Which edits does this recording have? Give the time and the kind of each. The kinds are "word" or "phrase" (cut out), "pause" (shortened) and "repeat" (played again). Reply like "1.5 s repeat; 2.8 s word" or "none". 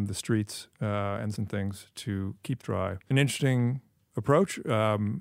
1.4 s word; 2.6 s word; 3.1 s phrase